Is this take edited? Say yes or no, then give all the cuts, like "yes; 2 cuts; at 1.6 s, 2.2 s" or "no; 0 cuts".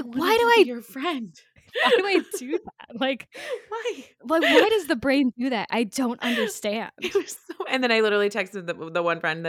no; 0 cuts